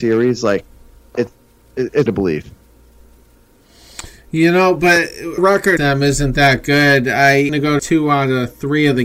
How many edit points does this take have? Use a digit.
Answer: 5